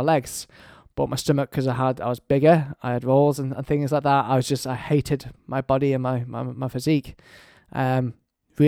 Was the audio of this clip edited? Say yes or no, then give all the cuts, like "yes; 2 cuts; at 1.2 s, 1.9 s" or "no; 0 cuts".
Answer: no; 0 cuts